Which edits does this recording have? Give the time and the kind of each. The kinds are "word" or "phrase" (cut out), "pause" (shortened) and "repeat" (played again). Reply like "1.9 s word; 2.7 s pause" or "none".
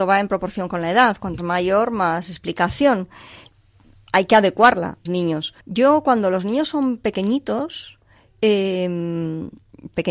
1.4 s word; 5.1 s phrase; 5.6 s pause